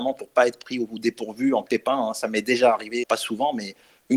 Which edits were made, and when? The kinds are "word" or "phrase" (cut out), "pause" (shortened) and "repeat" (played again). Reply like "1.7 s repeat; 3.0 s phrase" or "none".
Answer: 1.7 s word; 3.0 s word